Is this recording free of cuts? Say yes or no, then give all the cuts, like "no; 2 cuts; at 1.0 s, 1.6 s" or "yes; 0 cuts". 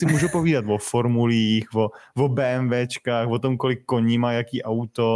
yes; 0 cuts